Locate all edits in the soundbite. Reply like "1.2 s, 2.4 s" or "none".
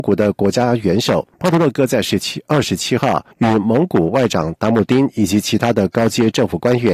1.3 s, 3.3 s